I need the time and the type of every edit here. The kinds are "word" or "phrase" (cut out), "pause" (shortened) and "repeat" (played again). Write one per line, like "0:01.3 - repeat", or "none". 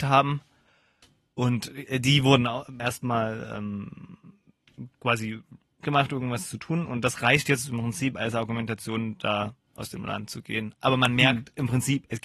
0:02.8 - word
0:05.8 - word